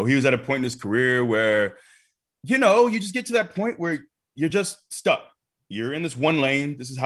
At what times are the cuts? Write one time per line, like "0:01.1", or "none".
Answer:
none